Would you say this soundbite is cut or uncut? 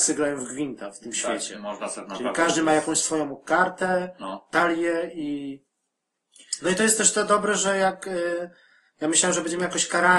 uncut